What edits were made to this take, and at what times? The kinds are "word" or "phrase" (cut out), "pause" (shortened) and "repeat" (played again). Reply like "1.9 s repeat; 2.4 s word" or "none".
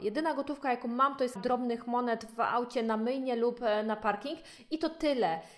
1.4 s word

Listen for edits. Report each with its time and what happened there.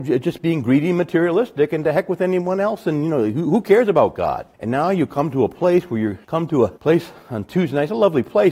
4.5 s pause; 6.2 s pause; 6.8 s pause

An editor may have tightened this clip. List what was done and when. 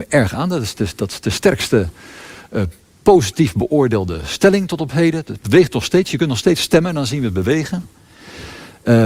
none

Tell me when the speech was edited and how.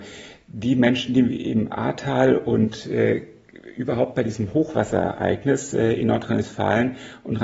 none

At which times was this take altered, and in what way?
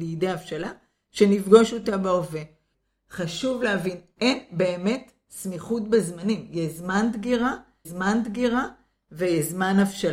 7.8 s repeat

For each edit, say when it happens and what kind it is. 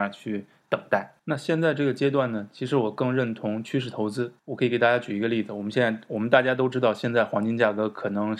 1.2 s pause; 4.4 s pause

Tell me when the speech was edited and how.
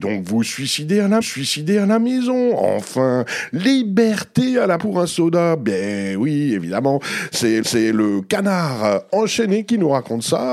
1.2 s repeat; 4.8 s phrase; 7.6 s repeat

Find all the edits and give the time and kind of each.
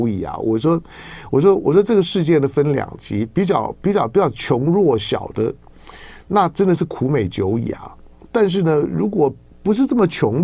none

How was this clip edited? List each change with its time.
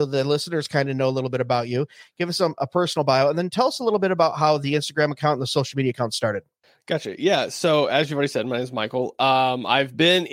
none

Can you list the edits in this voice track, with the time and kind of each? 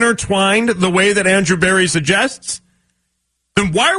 none

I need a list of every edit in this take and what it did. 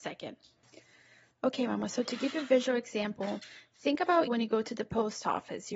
4.3 s word

